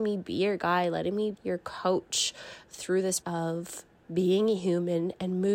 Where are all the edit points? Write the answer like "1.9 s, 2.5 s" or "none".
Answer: 1.3 s, 3.2 s